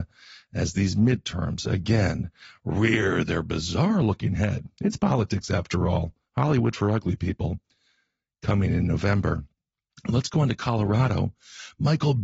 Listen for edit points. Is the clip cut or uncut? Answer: uncut